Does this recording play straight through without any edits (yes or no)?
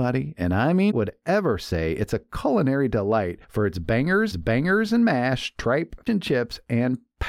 no